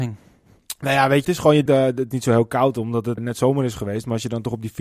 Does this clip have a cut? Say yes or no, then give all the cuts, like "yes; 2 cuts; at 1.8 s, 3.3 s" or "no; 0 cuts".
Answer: yes; 4 cuts; at 1.2 s, 1.7 s, 2.1 s, 3.2 s